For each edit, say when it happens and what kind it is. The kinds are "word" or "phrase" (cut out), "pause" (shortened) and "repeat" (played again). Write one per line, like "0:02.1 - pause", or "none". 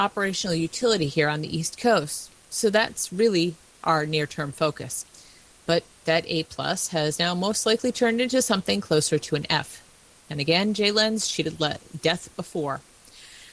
none